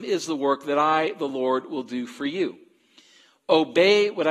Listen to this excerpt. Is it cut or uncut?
uncut